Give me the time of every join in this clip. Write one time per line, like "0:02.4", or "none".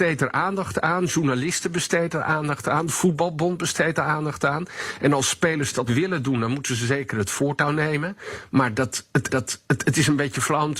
0:05.9
0:09.3